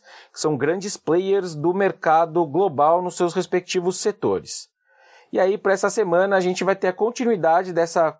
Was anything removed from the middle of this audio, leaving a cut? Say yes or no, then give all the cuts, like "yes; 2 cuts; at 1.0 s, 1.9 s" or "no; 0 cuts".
no; 0 cuts